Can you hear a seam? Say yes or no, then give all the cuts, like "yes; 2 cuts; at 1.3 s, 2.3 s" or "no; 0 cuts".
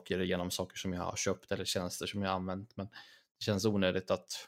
no; 0 cuts